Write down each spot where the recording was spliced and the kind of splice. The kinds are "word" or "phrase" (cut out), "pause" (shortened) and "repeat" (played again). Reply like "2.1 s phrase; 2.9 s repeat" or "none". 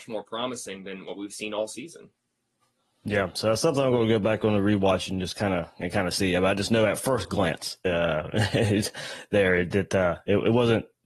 none